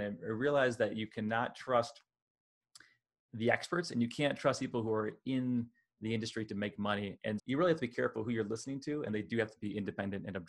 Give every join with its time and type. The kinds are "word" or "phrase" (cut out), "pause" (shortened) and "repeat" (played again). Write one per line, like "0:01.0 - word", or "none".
0:07.4 - word